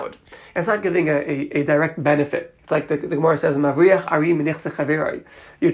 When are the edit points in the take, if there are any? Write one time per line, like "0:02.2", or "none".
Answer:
0:02.6

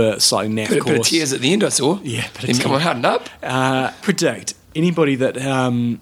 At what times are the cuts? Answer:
0:02.6
0:04.0
0:04.6

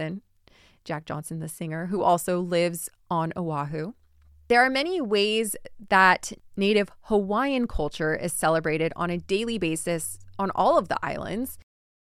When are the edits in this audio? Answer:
none

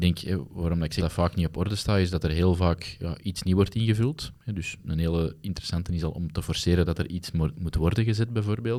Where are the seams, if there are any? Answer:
0:01.0
0:03.0

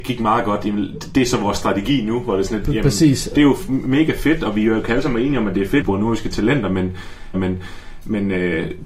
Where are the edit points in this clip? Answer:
0:03.7
0:05.8
0:07.3

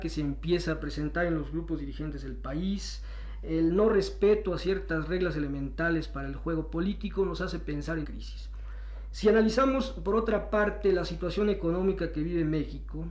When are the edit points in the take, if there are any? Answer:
0:08.0

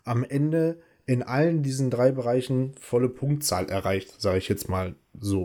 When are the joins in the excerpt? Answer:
none

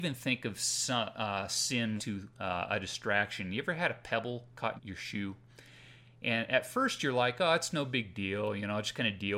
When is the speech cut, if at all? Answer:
0:02.0
0:04.8

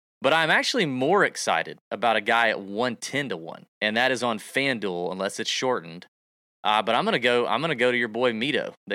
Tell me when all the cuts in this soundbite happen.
0:03.7

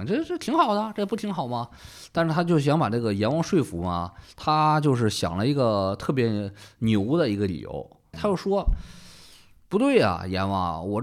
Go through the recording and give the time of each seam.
0:08.1

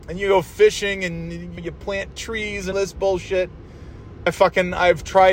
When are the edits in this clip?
0:01.6
0:02.7
0:04.3

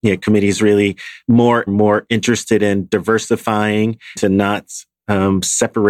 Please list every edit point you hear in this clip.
0:01.7
0:04.2

